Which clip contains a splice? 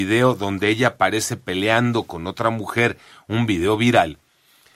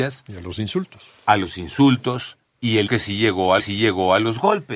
second; 3 cuts; at 2.4 s, 2.9 s, 3.6 s

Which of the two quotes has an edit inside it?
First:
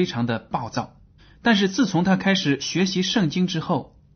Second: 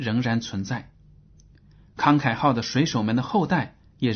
first; 1 cut; at 1.2 s

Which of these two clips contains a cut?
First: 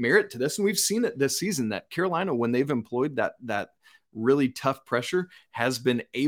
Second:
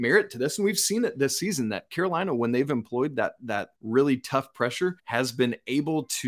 second; 2 cuts; at 3.7 s, 5.0 s

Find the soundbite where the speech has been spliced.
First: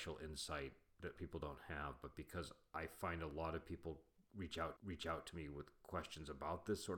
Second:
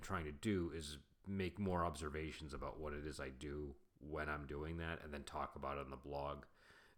first; 2 cuts; at 1.2 s, 4.8 s

